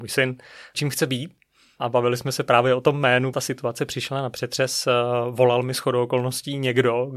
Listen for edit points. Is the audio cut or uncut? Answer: cut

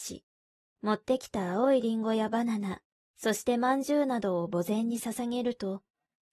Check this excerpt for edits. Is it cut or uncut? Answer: uncut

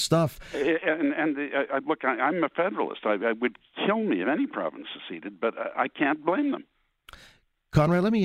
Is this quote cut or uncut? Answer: uncut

